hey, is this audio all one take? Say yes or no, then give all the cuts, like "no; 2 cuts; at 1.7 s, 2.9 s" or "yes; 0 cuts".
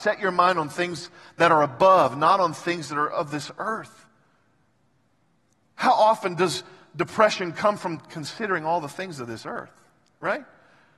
yes; 0 cuts